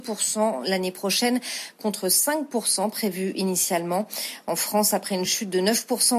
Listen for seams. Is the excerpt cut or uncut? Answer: uncut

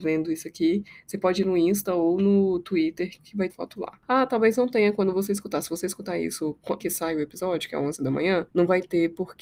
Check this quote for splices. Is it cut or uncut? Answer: cut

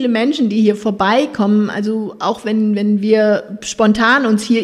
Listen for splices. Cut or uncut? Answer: uncut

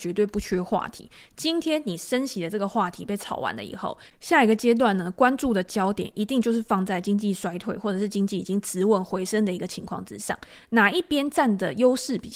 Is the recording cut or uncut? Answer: uncut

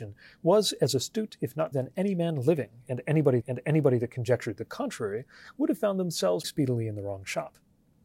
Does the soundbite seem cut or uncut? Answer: cut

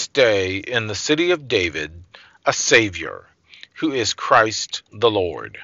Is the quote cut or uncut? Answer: uncut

